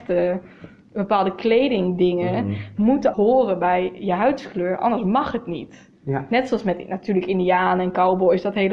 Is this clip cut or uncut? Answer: cut